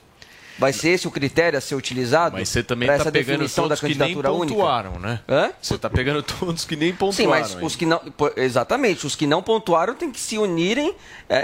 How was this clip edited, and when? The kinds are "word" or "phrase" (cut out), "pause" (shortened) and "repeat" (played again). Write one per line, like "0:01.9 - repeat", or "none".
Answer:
none